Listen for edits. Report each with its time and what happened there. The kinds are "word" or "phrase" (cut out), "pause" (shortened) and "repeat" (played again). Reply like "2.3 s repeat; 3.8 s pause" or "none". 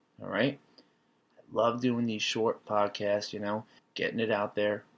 2.6 s word; 3.8 s pause